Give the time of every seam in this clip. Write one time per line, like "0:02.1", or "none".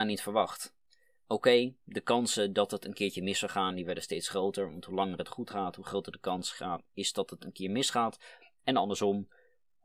0:01.8

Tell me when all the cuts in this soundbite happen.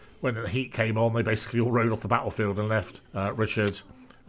0:03.0

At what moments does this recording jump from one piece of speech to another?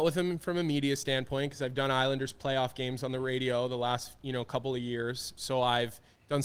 none

